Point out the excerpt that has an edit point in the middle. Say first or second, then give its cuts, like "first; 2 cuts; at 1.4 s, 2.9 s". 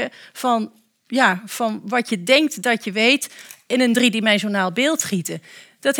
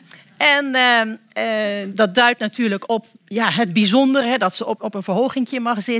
second; 3 cuts; at 1.9 s, 2.9 s, 4.8 s